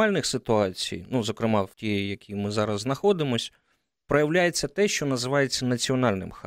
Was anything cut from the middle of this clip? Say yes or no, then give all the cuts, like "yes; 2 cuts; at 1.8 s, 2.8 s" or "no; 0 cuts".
yes; 1 cut; at 1.7 s